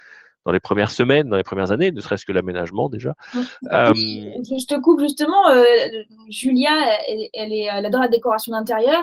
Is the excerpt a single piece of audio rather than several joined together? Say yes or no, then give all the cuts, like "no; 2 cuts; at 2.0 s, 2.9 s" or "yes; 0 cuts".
yes; 0 cuts